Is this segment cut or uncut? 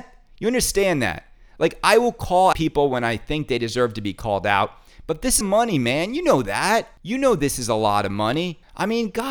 cut